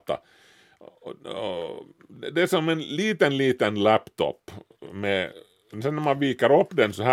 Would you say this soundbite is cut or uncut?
uncut